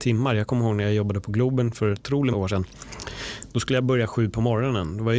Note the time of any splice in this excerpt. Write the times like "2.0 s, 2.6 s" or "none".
1.9 s, 2.3 s